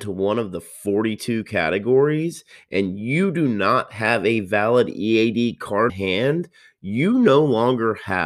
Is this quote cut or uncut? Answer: cut